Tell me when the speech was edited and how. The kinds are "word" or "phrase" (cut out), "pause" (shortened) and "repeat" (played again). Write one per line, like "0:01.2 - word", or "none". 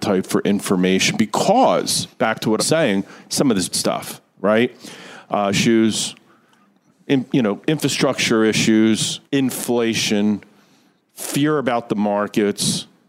0:02.1 - pause
0:02.6 - word
0:03.7 - word
0:05.5 - word
0:09.3 - pause